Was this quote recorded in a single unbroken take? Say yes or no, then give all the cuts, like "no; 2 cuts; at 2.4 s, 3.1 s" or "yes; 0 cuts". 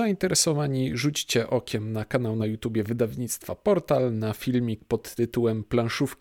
yes; 0 cuts